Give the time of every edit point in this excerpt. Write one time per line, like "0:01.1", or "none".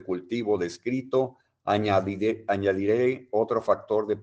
none